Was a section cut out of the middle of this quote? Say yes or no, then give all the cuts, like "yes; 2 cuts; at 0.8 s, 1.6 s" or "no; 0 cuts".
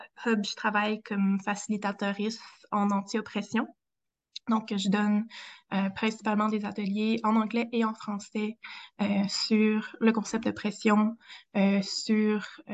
no; 0 cuts